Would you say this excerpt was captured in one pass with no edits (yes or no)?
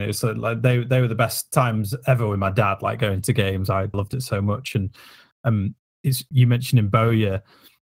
no